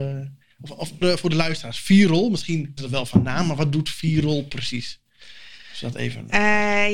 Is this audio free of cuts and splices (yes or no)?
no